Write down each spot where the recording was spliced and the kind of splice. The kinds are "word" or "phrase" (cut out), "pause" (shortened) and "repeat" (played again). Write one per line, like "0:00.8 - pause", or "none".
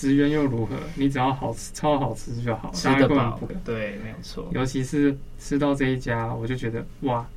0:03.5 - word